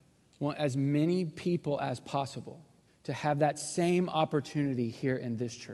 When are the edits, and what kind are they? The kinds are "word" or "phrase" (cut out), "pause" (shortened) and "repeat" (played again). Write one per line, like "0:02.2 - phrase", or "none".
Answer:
0:02.9 - pause